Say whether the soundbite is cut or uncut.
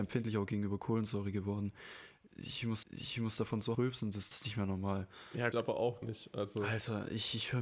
cut